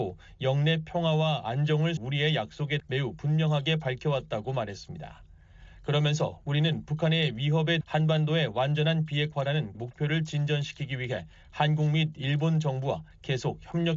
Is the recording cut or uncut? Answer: cut